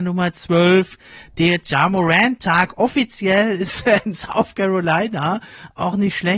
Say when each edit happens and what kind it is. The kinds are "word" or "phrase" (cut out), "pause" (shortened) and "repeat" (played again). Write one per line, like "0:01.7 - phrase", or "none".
none